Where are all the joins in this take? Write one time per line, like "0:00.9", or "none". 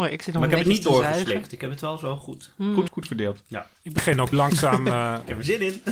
0:02.9
0:03.7
0:04.3